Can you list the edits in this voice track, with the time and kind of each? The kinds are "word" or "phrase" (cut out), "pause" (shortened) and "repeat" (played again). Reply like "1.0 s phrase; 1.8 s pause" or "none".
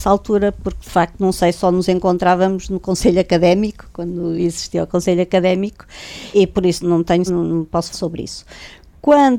6.3 s word; 6.8 s word; 7.3 s word; 7.9 s word